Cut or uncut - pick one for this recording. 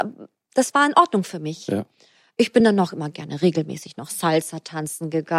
uncut